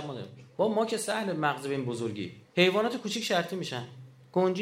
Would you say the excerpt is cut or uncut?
cut